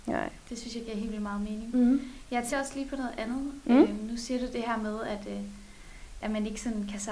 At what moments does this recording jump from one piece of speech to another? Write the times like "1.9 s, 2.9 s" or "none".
2.5 s, 6.2 s